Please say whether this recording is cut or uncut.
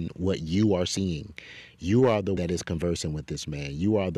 cut